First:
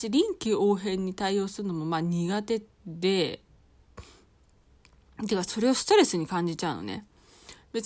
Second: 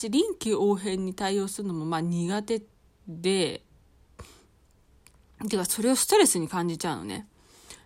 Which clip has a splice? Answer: first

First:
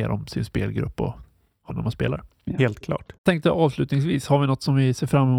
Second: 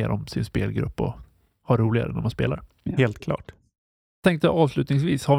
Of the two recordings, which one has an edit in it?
first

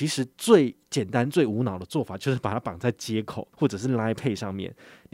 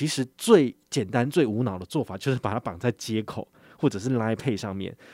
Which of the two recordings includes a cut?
first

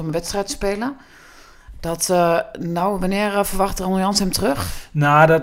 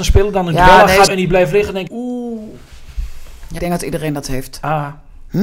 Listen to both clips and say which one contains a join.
second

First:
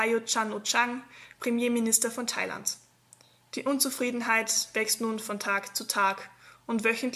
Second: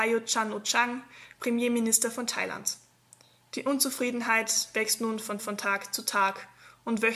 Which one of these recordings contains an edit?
second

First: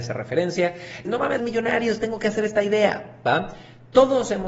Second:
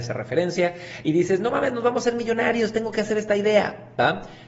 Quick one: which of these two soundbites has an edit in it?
first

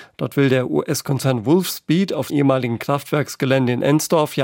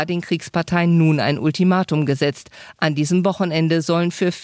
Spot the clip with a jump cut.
first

